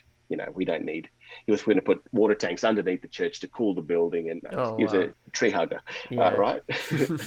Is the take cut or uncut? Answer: cut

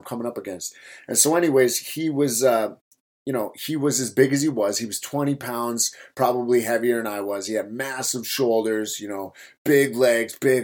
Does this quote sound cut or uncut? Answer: uncut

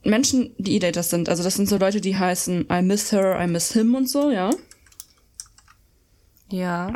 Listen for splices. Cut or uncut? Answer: uncut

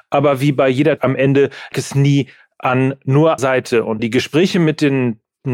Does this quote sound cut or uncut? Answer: cut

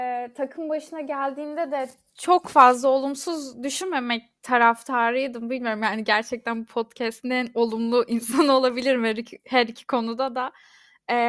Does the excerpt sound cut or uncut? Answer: uncut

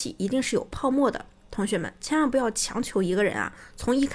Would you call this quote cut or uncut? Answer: uncut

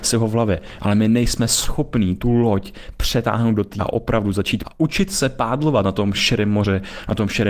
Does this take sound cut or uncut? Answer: cut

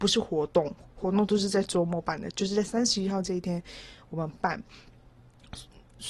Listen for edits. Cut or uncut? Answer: uncut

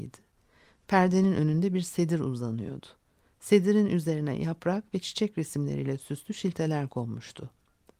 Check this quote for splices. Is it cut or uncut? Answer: uncut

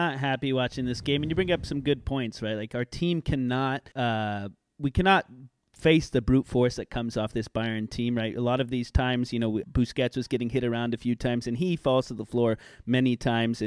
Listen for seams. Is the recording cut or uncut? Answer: cut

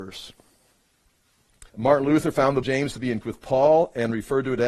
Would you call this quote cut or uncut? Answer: cut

